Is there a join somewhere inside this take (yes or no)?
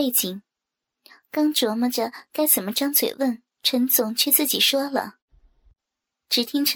yes